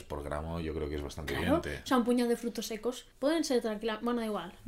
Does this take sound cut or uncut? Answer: cut